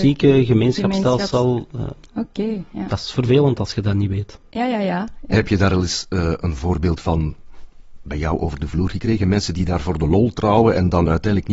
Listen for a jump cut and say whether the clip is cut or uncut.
uncut